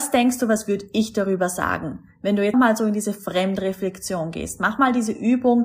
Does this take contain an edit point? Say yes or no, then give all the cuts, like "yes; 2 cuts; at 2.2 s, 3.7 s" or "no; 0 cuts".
yes; 1 cut; at 2.5 s